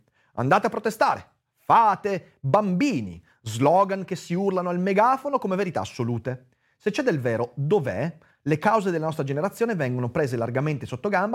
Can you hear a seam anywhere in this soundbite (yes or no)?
no